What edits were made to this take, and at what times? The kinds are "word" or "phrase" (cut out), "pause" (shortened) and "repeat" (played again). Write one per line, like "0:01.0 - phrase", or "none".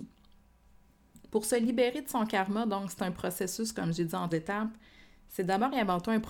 0:04.3 - word